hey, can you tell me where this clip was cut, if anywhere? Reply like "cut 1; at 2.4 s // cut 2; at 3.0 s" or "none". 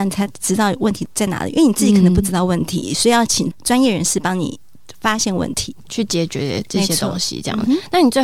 cut 1; at 5.8 s